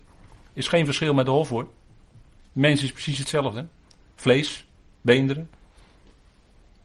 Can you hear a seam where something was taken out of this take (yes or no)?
no